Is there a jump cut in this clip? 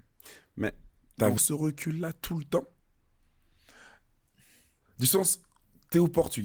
yes; 1 cut; at 1.4 s

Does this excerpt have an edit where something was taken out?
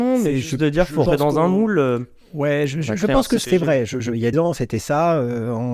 yes; 3 cuts; at 1.1 s, 3.4 s, 4.3 s

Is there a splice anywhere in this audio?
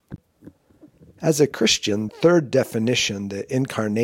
yes; 1 cut; at 2.1 s

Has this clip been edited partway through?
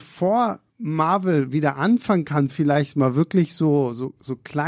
no; 0 cuts

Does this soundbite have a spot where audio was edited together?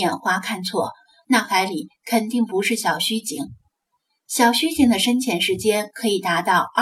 no; 0 cuts

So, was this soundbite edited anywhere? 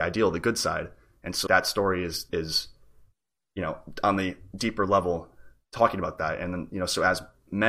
yes; 2 cuts; at 1.5 s, 2.3 s

